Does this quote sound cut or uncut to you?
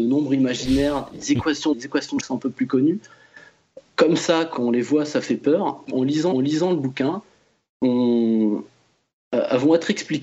cut